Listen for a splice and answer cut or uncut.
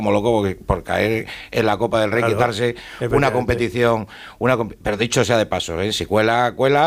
uncut